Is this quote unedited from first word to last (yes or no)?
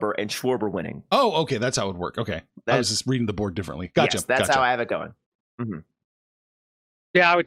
yes